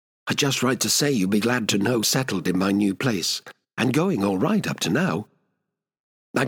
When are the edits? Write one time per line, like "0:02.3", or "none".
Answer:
0:02.0
0:03.6